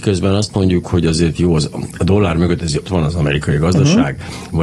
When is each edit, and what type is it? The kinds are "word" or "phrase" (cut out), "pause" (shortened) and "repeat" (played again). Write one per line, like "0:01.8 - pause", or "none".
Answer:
0:02.9 - word